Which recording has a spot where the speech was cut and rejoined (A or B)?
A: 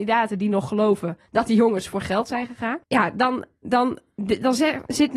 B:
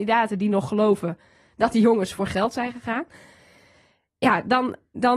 A